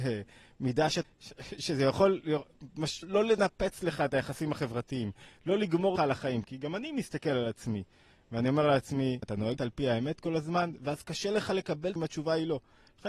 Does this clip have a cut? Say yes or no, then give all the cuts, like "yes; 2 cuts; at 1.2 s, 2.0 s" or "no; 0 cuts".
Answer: yes; 6 cuts; at 1.0 s, 3.0 s, 6.0 s, 9.2 s, 9.6 s, 12.0 s